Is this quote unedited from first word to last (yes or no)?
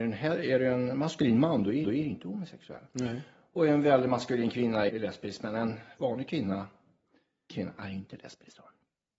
no